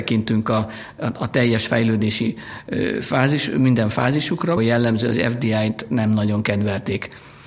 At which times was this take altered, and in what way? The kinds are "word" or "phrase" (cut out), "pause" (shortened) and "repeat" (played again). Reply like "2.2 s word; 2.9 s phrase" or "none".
4.6 s word